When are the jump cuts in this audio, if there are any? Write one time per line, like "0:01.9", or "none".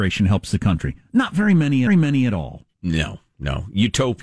0:01.9
0:02.7